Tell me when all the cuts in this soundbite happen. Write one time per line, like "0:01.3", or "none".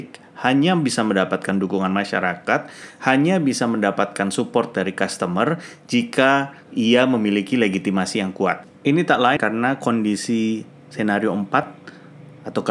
0:06.6
0:08.7
0:09.4